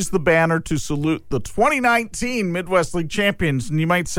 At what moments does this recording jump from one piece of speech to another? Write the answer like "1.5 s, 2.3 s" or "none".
none